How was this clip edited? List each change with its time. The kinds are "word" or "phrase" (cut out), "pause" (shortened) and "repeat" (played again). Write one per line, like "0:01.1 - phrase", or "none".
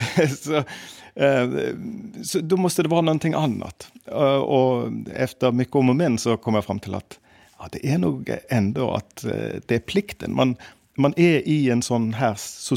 none